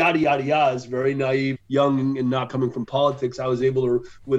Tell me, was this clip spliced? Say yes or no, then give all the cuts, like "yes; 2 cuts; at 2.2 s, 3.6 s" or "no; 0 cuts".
yes; 2 cuts; at 1.5 s, 2.5 s